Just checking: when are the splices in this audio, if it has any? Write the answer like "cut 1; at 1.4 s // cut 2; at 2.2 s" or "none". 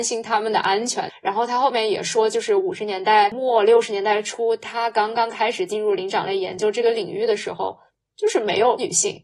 cut 1; at 7.9 s